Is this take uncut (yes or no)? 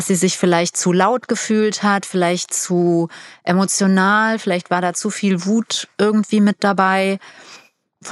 yes